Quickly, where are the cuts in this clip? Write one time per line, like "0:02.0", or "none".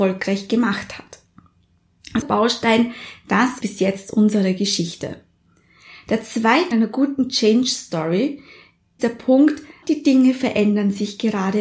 0:02.2
0:03.6
0:06.7
0:09.0
0:09.8